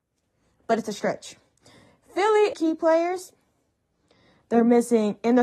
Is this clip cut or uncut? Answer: cut